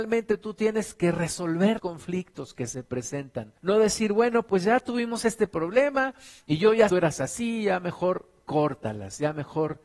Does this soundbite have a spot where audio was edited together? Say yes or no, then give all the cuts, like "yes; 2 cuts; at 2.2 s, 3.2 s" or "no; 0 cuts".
yes; 3 cuts; at 1.8 s, 3.6 s, 6.9 s